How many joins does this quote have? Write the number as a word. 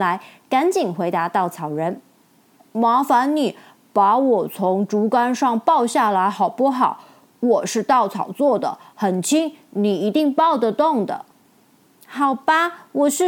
zero